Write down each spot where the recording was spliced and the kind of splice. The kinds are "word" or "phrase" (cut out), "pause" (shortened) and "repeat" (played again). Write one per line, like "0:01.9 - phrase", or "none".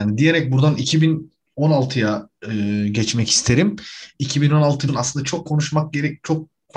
0:04.9 - word
0:05.5 - word